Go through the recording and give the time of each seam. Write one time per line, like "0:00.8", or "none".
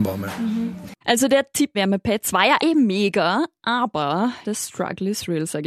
0:01.0
0:01.7
0:02.6
0:04.4